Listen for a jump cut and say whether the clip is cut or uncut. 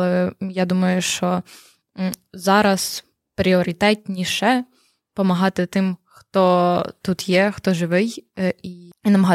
uncut